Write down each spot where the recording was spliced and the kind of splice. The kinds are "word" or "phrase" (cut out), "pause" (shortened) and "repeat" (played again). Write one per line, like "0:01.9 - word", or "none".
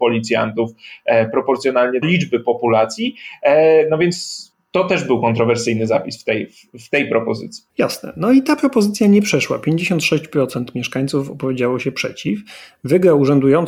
0:02.0 - phrase
0:04.5 - pause
0:07.7 - pause